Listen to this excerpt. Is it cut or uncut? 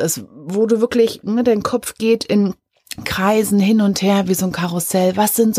uncut